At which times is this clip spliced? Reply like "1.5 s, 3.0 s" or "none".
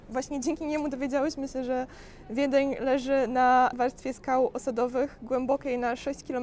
none